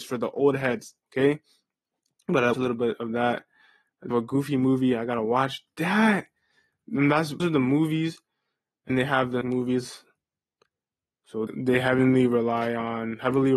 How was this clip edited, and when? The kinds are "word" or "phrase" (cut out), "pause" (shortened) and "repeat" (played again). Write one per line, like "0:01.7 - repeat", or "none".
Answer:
0:02.5 - word
0:04.1 - word
0:07.4 - word
0:08.9 - word
0:09.4 - word
0:11.5 - word